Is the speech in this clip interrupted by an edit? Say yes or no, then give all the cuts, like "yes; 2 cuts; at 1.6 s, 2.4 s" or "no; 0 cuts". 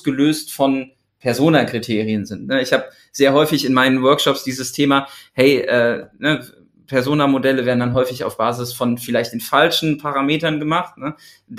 no; 0 cuts